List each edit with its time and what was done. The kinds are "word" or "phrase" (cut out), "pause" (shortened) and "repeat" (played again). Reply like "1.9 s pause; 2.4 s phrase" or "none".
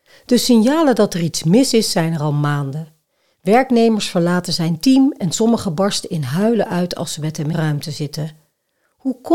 7.5 s word